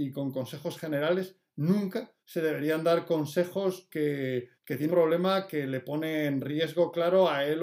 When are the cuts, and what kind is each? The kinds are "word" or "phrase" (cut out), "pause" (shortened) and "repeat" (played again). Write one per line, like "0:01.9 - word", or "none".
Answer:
0:02.2 - pause
0:03.9 - phrase
0:04.6 - pause
0:04.9 - word